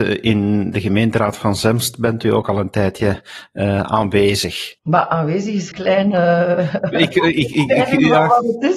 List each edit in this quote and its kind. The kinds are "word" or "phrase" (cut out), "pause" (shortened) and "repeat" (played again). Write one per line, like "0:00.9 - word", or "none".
0:04.8 - pause
0:05.7 - word